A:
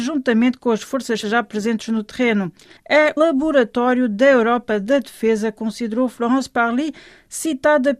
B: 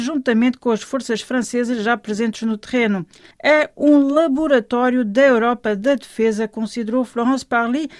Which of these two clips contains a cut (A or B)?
A